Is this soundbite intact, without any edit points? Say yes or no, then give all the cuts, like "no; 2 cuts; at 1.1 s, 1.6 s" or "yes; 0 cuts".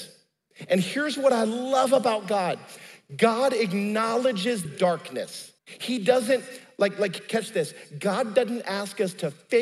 no; 2 cuts; at 4.7 s, 5.6 s